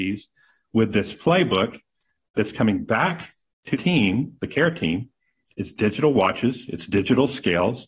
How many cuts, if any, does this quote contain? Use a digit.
2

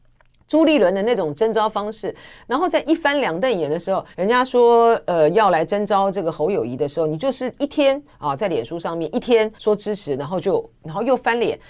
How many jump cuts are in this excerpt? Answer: 2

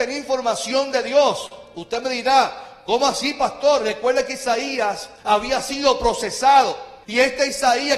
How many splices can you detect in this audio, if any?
2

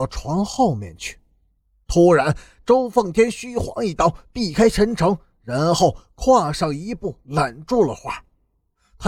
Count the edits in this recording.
0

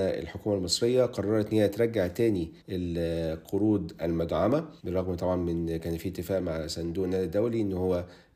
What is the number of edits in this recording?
2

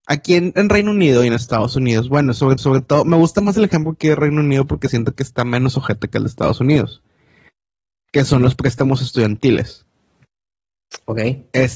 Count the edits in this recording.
1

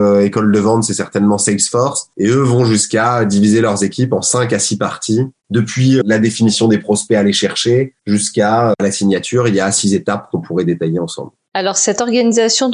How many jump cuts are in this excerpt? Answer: 3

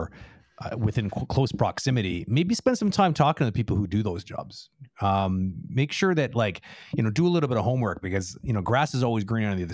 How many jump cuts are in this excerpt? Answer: 0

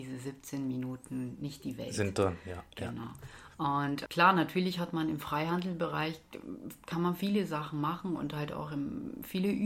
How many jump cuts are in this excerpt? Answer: 1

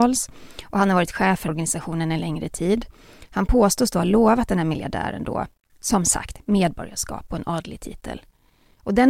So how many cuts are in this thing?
2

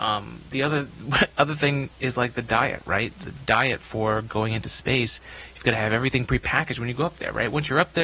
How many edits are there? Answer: 0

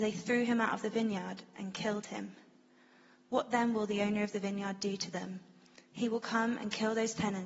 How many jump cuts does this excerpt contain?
0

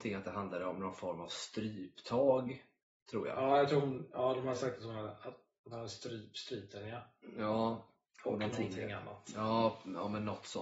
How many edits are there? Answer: 1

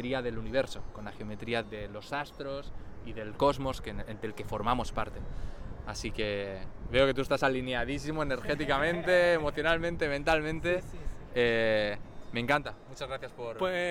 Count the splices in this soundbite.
1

